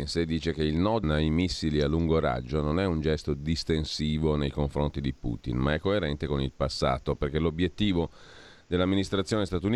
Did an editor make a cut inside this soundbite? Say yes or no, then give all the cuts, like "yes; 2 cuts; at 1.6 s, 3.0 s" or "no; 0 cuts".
yes; 1 cut; at 1.0 s